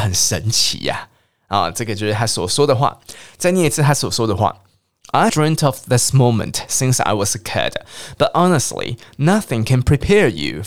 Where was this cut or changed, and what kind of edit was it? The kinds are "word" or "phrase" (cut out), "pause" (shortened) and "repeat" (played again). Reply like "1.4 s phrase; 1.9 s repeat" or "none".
5.3 s word